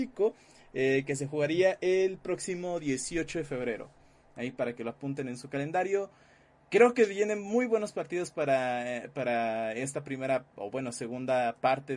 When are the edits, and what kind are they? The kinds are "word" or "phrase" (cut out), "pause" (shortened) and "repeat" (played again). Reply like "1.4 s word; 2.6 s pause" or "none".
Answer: none